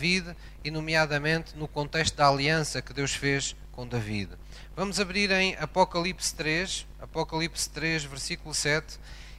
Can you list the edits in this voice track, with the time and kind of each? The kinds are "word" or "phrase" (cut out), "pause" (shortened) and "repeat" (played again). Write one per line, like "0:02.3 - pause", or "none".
none

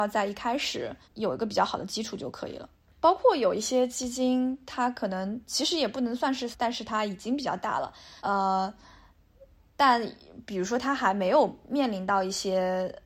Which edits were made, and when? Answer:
0:01.0 - pause
0:02.9 - pause
0:06.5 - word
0:08.2 - pause

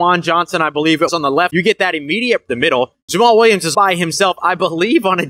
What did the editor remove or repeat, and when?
0:01.1 - word
0:01.5 - word
0:02.5 - phrase
0:03.0 - pause
0:03.7 - word

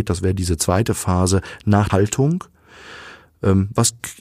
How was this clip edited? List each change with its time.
0:01.9 - word

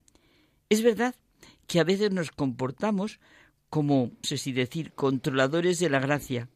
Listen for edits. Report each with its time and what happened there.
0:04.2 - word

